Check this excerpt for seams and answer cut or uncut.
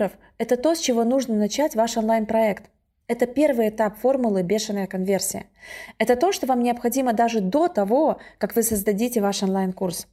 uncut